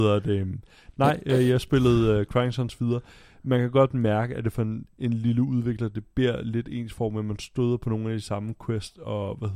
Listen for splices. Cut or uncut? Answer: uncut